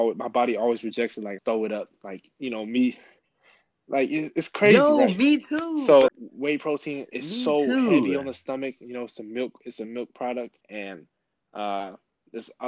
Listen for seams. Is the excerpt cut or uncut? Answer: cut